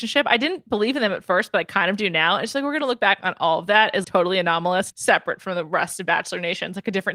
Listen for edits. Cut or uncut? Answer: cut